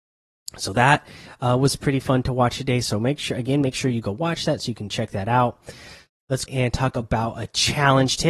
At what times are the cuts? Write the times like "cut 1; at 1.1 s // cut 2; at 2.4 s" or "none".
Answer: cut 1; at 6.5 s